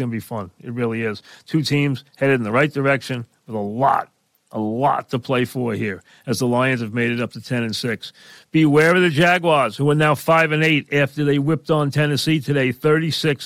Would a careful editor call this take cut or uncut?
uncut